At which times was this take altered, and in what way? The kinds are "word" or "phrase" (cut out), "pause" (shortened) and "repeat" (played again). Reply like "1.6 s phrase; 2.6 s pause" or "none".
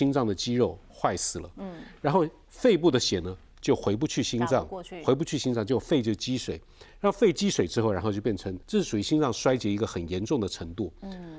8.6 s pause